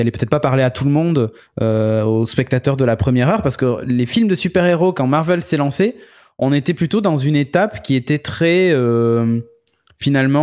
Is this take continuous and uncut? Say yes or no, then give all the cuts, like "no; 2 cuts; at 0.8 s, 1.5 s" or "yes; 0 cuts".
yes; 0 cuts